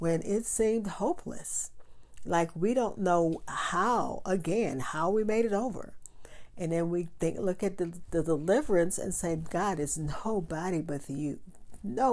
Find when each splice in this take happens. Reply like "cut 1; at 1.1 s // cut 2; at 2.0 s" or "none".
none